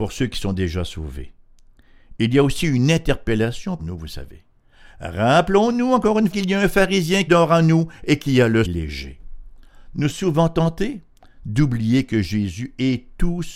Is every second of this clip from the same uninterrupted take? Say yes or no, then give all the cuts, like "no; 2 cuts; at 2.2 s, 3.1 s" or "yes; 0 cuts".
no; 5 cuts; at 3.8 s, 6.3 s, 7.3 s, 8.6 s, 10.1 s